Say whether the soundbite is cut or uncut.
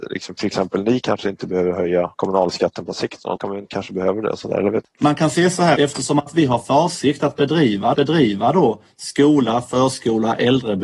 cut